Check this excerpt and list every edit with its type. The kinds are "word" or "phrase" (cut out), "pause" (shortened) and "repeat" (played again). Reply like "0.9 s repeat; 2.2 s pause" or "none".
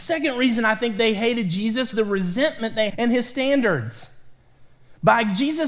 1.9 s word; 2.9 s phrase